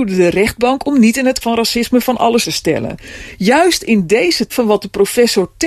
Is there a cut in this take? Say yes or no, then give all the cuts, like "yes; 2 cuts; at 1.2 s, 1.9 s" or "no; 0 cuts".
yes; 3 cuts; at 1.4 s, 2.4 s, 4.5 s